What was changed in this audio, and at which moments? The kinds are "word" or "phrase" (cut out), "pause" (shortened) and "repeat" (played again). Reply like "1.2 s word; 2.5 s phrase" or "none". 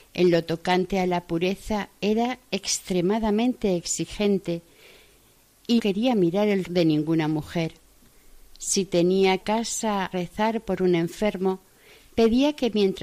5.8 s word; 6.6 s word; 9.4 s phrase; 10.1 s word

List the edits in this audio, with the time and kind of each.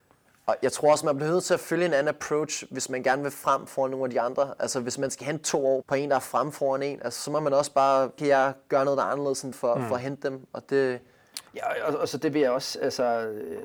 5.8 s word; 8.2 s word; 9.5 s word; 11.5 s pause

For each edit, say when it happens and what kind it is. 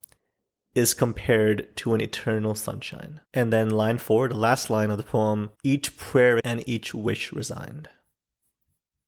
3.2 s pause; 5.6 s pause; 6.4 s word

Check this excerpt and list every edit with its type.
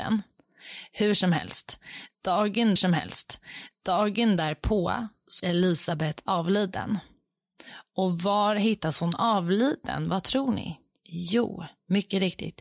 2.8 s repeat; 5.4 s word

